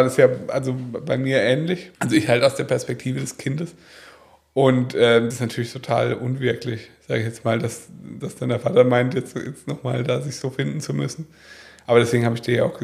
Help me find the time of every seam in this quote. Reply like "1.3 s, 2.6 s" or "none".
1.9 s, 5.3 s